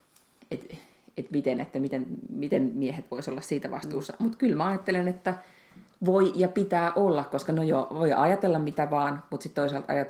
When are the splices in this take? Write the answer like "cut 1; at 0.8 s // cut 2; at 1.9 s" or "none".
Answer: none